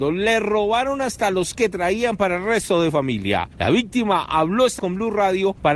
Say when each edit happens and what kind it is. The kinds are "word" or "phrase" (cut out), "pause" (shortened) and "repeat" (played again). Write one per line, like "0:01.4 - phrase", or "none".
0:01.5 - word
0:04.8 - word